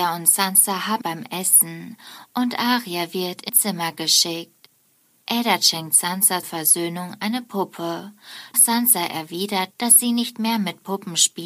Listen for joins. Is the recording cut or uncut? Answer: cut